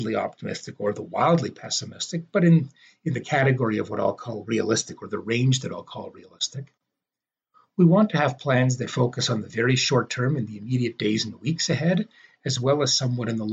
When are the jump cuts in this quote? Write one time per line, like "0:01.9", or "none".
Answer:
none